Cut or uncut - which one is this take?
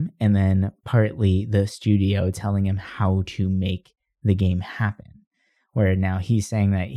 uncut